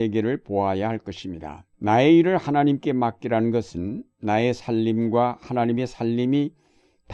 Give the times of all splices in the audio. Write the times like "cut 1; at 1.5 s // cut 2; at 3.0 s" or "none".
cut 1; at 1.7 s